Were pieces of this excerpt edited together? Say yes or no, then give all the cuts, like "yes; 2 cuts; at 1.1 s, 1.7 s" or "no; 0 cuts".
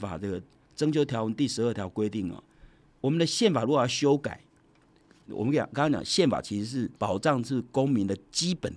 yes; 1 cut; at 7.0 s